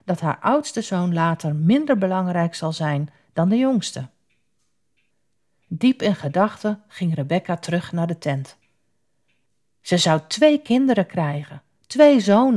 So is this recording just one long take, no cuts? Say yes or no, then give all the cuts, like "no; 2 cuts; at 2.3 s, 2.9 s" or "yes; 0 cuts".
yes; 0 cuts